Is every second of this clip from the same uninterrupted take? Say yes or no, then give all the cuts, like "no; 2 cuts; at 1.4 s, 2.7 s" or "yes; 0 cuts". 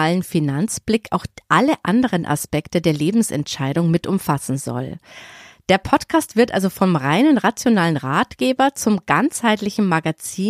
yes; 0 cuts